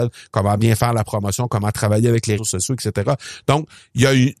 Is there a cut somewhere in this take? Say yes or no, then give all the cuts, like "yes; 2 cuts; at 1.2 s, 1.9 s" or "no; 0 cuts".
yes; 1 cut; at 2.4 s